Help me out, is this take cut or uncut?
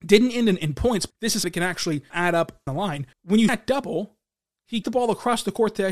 cut